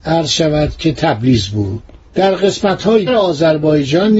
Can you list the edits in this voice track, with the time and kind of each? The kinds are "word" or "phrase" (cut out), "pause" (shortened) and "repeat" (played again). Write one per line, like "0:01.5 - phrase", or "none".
0:03.1 - word